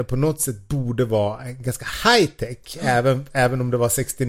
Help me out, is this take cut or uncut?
uncut